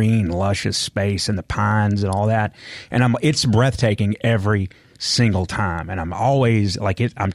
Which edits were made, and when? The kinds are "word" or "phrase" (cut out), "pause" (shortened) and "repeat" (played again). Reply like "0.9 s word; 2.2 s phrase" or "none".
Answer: none